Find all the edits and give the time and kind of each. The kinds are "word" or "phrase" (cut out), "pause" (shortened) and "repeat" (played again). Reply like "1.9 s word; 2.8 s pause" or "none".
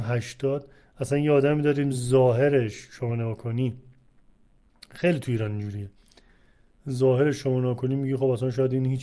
none